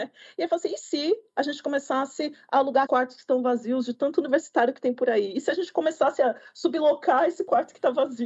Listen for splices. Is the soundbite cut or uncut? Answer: cut